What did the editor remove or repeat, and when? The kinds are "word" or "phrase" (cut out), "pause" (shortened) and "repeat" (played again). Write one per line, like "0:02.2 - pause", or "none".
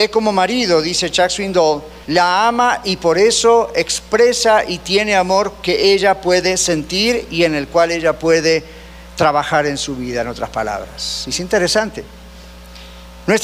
0:02.0 - pause